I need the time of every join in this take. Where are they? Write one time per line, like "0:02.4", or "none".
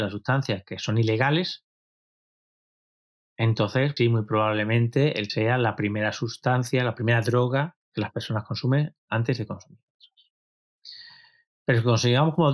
0:04.0
0:05.3
0:07.8